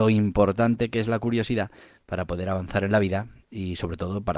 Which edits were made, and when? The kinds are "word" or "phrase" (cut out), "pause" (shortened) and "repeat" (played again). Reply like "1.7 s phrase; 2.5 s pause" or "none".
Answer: none